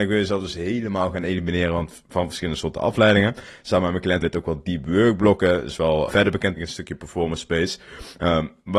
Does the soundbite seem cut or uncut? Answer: cut